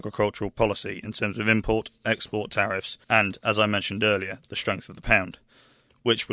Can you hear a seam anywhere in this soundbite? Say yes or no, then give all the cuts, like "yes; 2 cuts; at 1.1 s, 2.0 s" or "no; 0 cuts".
yes; 1 cut; at 3.0 s